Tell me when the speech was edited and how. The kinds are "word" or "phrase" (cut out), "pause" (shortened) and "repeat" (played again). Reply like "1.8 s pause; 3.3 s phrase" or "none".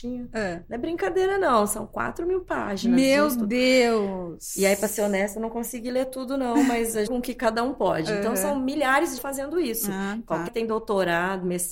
7.1 s phrase; 9.2 s phrase; 10.5 s word